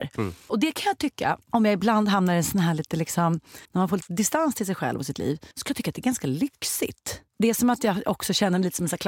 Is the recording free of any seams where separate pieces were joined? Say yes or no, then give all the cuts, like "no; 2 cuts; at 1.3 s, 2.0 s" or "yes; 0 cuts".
no; 4 cuts; at 1.4 s, 3.6 s, 5.5 s, 7.3 s